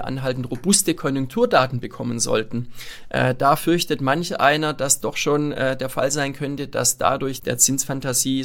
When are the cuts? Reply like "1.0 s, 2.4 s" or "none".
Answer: 5.0 s, 7.4 s